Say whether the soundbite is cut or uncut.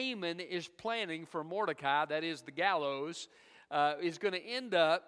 uncut